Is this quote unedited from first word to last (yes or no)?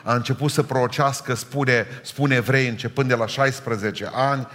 yes